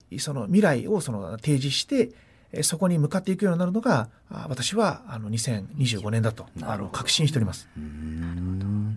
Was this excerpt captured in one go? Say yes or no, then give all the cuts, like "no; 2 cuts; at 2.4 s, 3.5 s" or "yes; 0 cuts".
no; 1 cut; at 4.2 s